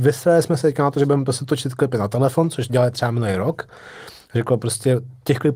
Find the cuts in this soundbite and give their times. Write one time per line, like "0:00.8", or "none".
0:02.7